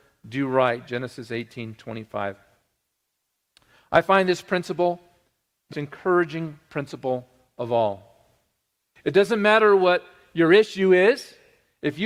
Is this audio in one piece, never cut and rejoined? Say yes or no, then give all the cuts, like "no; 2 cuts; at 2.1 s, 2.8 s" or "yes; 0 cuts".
no; 1 cut; at 5.7 s